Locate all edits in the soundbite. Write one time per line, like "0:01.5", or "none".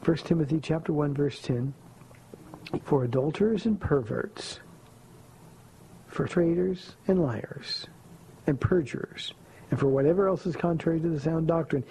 0:02.8
0:06.3